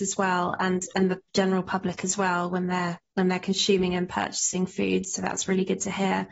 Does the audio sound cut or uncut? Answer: uncut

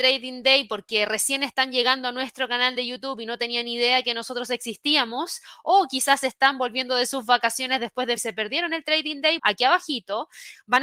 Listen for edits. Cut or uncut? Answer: cut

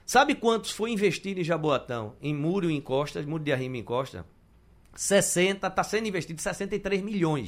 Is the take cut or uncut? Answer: uncut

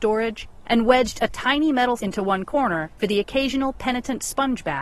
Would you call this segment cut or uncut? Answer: cut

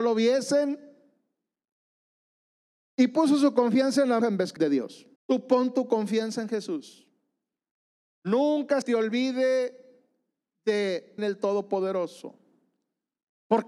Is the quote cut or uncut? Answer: cut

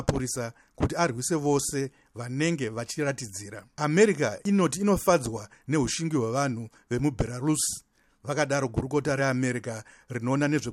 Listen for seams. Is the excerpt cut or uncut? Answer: uncut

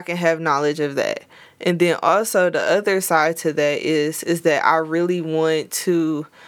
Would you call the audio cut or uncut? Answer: uncut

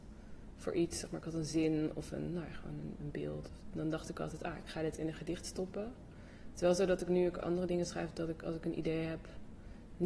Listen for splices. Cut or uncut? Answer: cut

